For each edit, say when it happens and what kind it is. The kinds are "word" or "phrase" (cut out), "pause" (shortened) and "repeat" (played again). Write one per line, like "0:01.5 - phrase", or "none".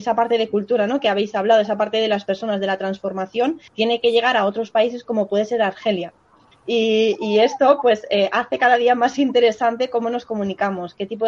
0:03.7 - pause